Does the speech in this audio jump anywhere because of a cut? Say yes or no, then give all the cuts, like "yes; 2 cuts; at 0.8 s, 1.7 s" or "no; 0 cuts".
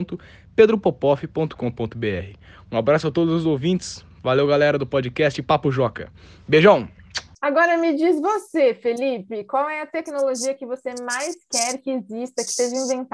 no; 0 cuts